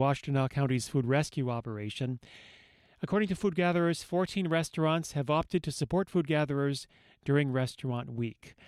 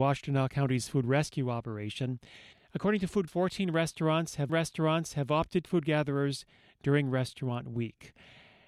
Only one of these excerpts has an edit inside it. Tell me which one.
second; 4 cuts; at 2.5 s, 3.3 s, 4.5 s, 5.6 s

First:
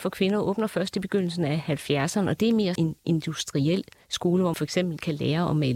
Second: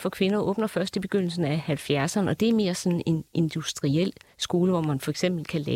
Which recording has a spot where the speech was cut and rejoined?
first; 2 cuts; at 2.8 s, 4.5 s

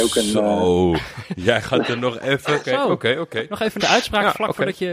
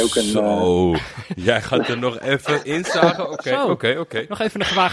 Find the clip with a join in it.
first; 2 cuts; at 2.6 s, 3.8 s

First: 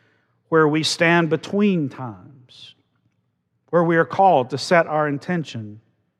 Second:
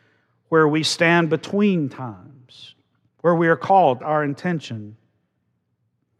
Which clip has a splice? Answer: second; 2 cuts; at 3.1 s, 4.0 s

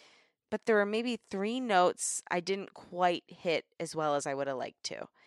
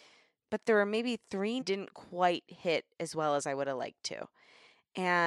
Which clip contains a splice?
second; 1 cut; at 1.6 s

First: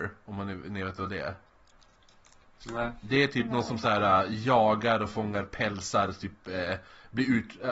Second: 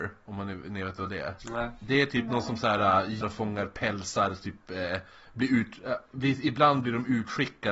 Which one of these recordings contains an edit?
second; 2 cuts; at 1.4 s, 3.2 s

